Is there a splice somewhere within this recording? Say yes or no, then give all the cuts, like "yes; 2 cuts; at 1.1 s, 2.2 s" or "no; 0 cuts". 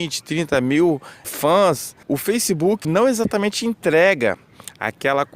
yes; 3 cuts; at 1.2 s, 2.0 s, 2.8 s